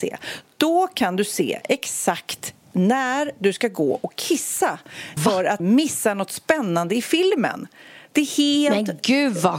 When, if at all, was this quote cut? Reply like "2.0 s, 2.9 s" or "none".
5.2 s, 5.6 s